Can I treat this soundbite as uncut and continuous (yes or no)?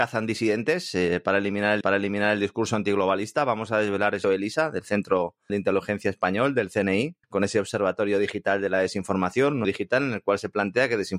no